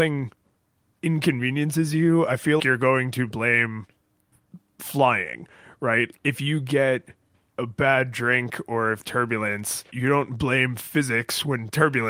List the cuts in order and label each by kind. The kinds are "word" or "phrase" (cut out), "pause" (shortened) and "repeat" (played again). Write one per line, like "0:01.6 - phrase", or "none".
0:02.6 - word
0:06.1 - word
0:09.0 - word
0:09.9 - word